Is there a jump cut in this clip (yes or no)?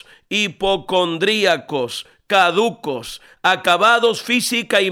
no